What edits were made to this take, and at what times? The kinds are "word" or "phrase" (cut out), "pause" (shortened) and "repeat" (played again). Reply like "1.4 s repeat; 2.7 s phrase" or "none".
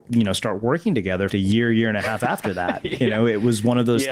1.3 s phrase